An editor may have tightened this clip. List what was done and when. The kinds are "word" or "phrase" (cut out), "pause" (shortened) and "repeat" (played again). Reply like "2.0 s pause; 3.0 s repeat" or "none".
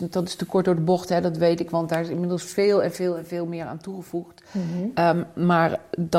none